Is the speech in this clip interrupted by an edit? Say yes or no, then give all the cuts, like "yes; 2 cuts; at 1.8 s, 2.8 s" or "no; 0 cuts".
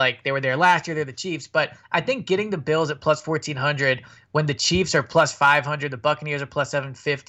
no; 0 cuts